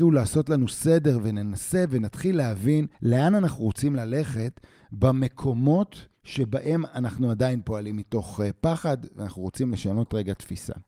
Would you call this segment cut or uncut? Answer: cut